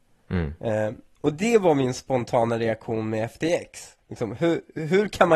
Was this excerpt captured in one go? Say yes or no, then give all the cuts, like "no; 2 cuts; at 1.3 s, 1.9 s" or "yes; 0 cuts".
no; 1 cut; at 4.0 s